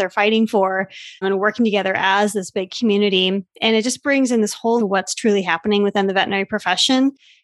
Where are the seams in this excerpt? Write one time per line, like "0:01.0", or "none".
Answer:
0:01.2
0:04.8